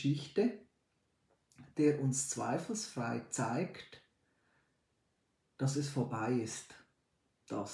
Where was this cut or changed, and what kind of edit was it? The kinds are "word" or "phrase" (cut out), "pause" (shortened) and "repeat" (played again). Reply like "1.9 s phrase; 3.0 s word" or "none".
none